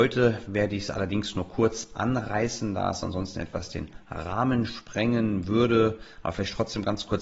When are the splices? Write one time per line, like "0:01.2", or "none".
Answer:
none